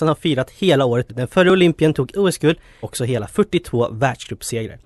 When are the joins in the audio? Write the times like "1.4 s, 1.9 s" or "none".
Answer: 1.1 s, 2.1 s, 2.8 s